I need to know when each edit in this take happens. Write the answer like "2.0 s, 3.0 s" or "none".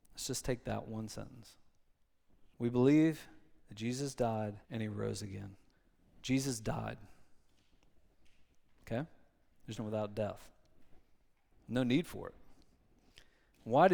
2.5 s, 4.6 s, 5.7 s, 9.8 s